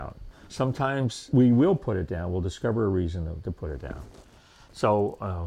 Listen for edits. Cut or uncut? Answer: uncut